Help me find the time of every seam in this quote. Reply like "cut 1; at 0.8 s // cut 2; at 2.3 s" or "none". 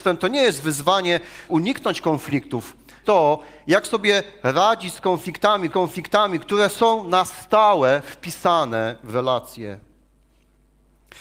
cut 1; at 1.5 s // cut 2; at 3.0 s // cut 3; at 5.7 s